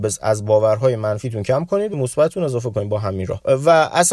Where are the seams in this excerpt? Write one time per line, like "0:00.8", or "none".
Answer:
0:01.9